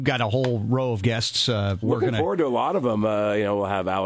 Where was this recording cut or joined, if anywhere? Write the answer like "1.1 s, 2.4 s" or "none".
1.8 s